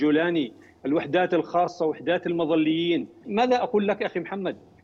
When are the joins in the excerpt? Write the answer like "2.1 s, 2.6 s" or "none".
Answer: 3.2 s

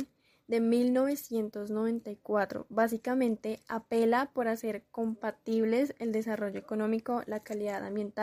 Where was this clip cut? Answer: none

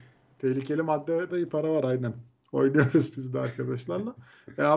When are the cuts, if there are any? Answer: 1.3 s

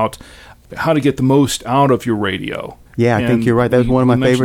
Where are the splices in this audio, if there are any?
2.9 s

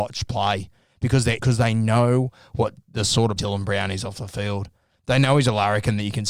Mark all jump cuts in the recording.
1.4 s, 3.4 s

